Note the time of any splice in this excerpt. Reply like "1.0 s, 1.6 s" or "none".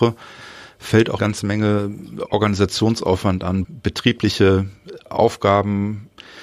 1.2 s, 3.6 s

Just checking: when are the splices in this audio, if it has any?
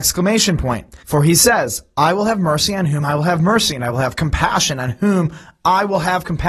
1.0 s

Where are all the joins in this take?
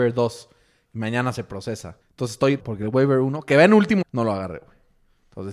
2.0 s, 2.6 s, 4.0 s

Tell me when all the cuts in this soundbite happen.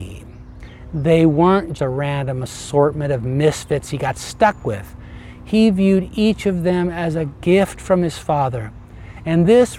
1.7 s

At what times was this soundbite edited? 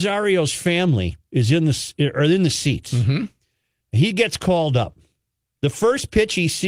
none

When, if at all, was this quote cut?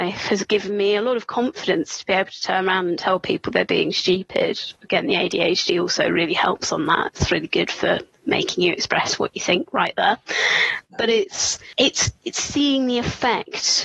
none

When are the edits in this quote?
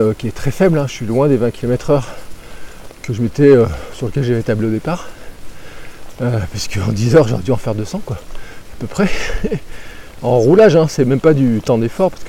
none

